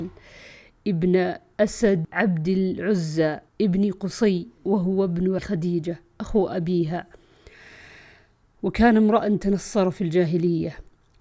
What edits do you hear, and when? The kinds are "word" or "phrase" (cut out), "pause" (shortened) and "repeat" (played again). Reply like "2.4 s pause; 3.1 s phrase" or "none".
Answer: 2.0 s word; 3.5 s pause; 5.4 s word